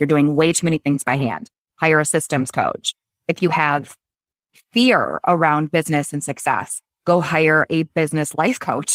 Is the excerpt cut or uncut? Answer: uncut